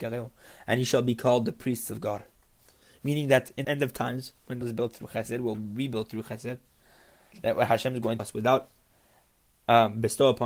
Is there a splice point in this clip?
yes; 4 cuts; at 3.6 s, 4.6 s, 5.5 s, 8.2 s

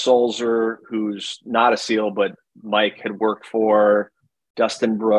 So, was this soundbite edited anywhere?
no; 0 cuts

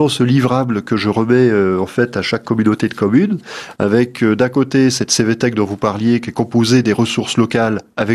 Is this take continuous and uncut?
yes; 0 cuts

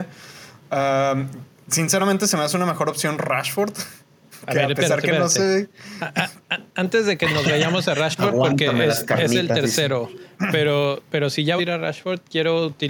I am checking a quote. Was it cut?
yes; 1 cut; at 11.6 s

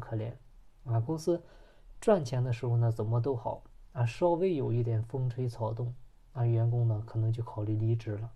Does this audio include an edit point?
no; 0 cuts

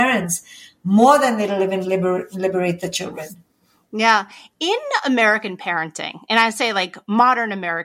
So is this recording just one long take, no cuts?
yes; 0 cuts

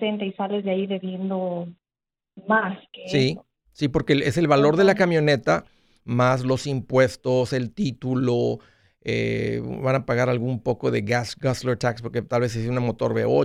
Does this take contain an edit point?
no; 0 cuts

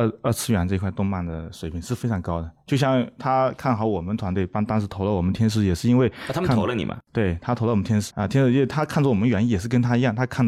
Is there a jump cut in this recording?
yes; 1 cut; at 8.1 s

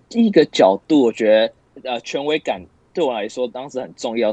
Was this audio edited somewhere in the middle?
no; 0 cuts

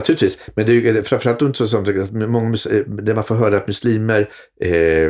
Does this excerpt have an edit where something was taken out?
no; 0 cuts

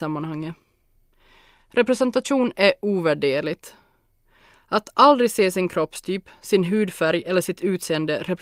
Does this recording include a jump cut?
no; 0 cuts

